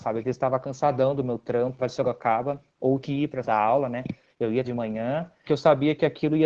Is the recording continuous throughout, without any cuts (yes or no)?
no